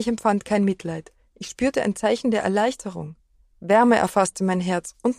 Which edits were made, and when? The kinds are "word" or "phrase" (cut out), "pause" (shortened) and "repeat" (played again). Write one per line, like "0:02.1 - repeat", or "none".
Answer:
none